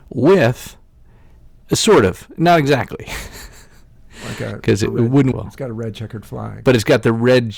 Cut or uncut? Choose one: cut